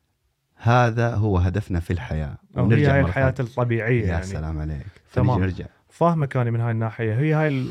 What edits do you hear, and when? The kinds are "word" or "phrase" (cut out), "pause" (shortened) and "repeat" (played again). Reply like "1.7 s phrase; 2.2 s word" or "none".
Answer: none